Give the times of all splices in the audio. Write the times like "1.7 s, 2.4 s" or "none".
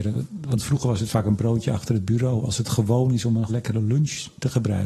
3.5 s